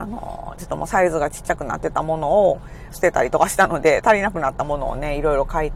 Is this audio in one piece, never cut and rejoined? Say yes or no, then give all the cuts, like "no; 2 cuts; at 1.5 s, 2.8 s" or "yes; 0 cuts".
no; 1 cut; at 2.9 s